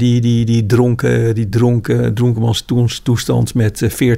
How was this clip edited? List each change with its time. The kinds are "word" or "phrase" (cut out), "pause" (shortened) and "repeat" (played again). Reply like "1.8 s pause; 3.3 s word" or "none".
none